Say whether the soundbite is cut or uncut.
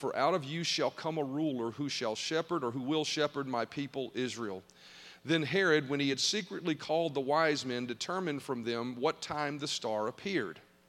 uncut